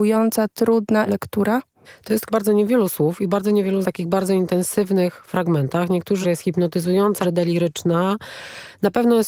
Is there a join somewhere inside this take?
yes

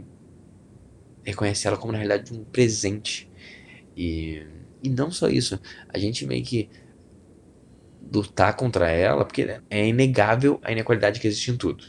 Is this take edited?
yes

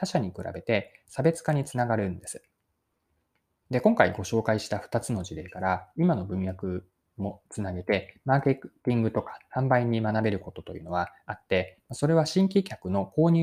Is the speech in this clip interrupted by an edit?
no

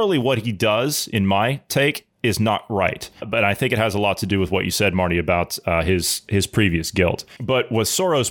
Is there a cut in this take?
no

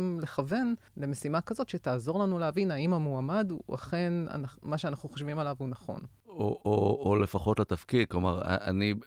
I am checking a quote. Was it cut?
no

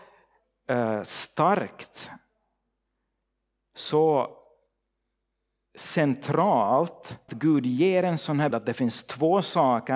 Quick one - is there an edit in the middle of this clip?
yes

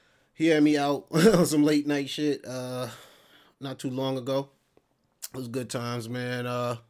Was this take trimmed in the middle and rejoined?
no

